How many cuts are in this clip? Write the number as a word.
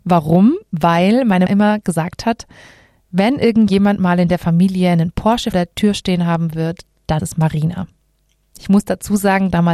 three